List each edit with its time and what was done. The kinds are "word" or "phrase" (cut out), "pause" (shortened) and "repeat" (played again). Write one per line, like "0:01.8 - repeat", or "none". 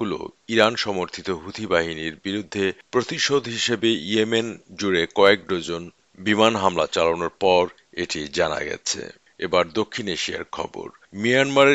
none